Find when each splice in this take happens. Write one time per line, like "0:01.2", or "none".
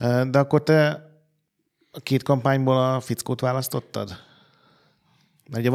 none